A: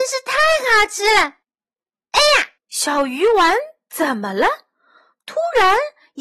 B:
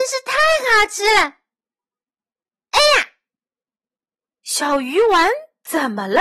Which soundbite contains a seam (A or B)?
A